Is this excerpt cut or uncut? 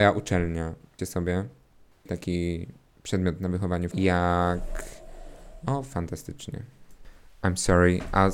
cut